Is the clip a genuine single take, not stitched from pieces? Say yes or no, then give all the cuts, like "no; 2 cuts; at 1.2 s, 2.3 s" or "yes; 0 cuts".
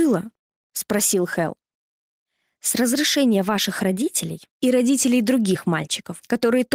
no; 1 cut; at 4.5 s